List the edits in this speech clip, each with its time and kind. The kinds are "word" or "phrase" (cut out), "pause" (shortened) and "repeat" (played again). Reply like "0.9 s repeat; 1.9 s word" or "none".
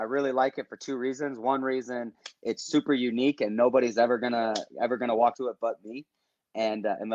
5.3 s word